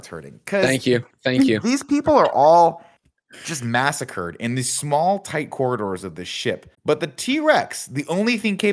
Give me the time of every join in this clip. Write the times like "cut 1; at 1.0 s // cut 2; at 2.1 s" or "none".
cut 1; at 6.7 s